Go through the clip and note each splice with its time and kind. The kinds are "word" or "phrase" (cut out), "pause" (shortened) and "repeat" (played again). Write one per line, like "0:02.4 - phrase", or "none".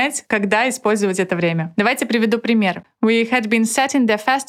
none